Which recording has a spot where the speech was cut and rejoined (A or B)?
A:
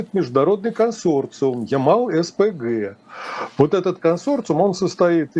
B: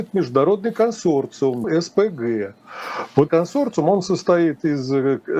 B